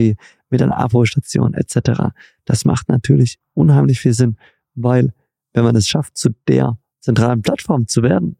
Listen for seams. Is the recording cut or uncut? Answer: uncut